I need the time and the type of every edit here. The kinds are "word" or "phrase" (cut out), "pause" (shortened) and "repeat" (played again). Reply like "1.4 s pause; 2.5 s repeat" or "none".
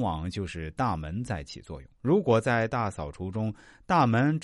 2.0 s pause